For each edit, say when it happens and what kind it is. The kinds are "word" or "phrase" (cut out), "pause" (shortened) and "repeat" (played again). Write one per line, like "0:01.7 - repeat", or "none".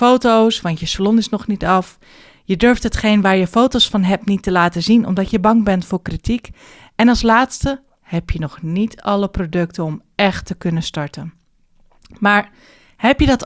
none